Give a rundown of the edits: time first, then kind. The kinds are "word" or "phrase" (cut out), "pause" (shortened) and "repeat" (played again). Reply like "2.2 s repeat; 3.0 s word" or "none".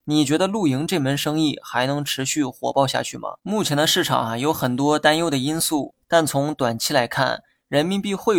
3.4 s pause; 6.0 s pause